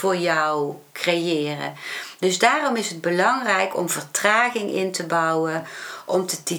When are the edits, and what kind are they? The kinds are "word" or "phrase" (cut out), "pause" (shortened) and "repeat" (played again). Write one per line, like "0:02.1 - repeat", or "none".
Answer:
none